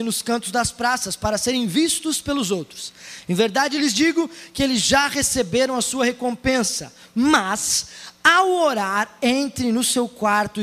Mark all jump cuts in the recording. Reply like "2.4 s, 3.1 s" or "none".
none

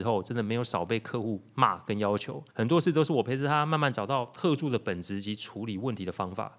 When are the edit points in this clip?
2.5 s

